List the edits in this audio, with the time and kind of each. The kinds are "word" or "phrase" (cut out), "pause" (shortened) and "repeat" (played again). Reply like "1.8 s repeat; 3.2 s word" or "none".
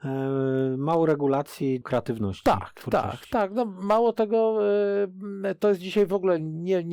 1.8 s word